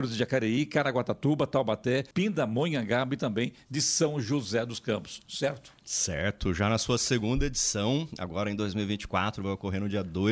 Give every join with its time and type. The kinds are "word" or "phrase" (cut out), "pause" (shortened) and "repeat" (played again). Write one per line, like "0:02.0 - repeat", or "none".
0:02.1 - pause

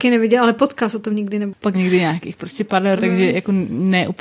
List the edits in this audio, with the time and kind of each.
0:01.1 - word
0:01.7 - word
0:03.0 - word

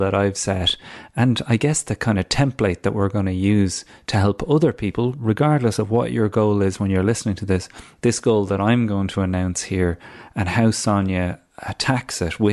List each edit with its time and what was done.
0:08.0 - word

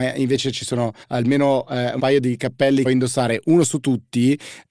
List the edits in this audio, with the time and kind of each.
0:01.0 - pause
0:02.0 - word
0:02.9 - phrase

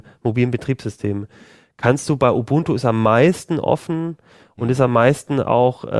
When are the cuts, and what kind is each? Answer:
none

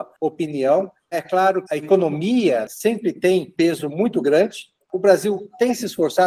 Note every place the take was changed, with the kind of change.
0:01.7 - word
0:03.6 - word

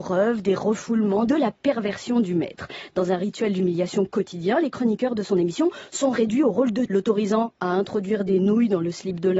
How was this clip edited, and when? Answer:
0:01.3 - phrase
0:06.9 - word

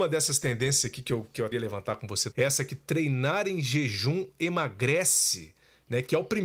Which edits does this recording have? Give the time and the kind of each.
0:01.5 - word
0:02.3 - word

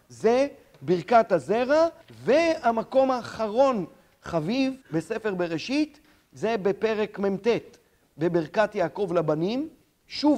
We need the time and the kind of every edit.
0:02.0 - pause
0:04.8 - pause

